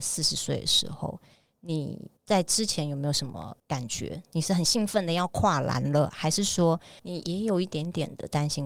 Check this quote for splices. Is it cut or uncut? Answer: cut